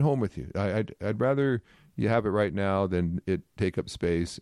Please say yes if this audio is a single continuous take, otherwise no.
yes